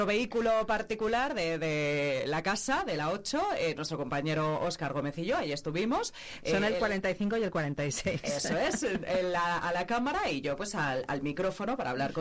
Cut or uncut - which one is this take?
uncut